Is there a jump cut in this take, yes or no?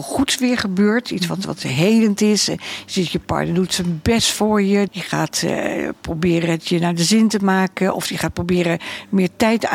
yes